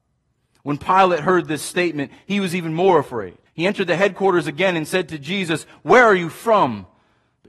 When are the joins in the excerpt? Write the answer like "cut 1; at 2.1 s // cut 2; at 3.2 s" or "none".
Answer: cut 1; at 3.5 s